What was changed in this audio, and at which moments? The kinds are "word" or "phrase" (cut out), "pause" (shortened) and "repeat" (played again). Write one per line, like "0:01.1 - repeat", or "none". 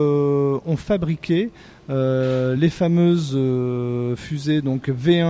none